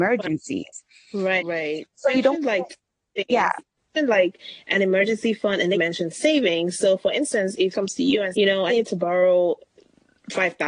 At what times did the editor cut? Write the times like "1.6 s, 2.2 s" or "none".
1.4 s, 3.6 s, 5.7 s, 7.7 s, 8.3 s, 8.7 s